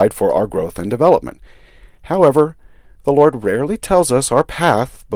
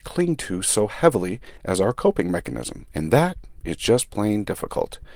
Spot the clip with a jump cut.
second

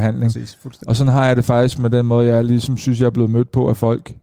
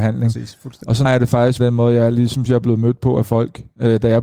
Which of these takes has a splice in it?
second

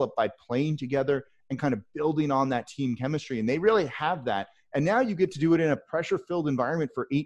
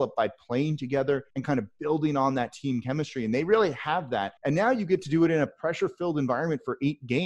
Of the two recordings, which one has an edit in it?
second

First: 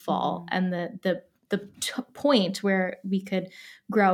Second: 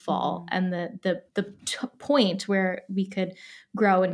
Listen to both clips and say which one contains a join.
second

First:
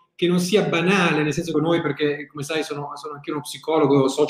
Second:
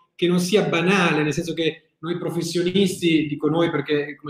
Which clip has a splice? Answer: first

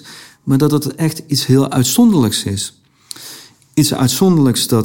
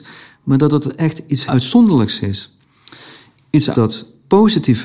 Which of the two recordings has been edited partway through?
second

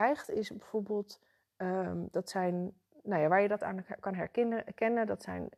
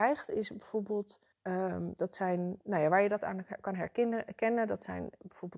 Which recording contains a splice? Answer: second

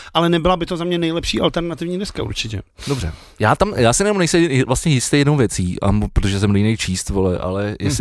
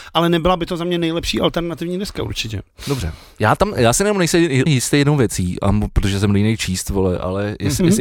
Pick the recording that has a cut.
second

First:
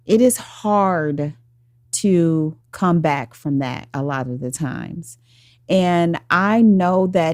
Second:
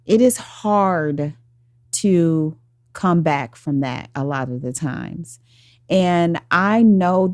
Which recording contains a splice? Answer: first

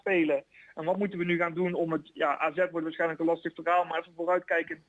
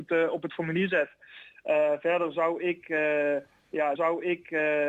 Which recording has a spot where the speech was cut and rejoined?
second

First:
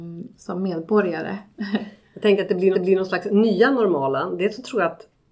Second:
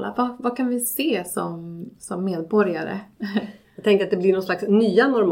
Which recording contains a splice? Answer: first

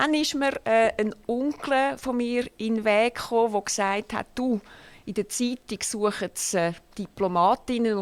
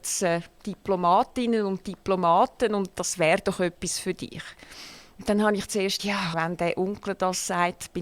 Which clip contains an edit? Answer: second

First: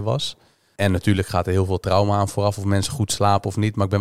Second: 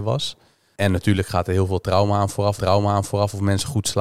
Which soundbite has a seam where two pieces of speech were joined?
second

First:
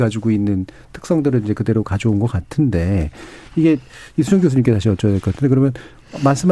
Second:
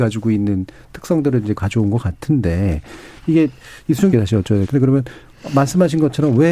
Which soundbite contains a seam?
second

